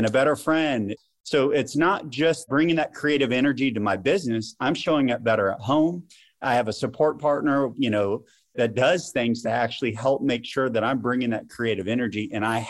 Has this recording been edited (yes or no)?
no